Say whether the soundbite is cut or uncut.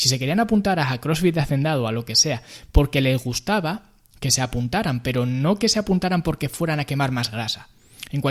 uncut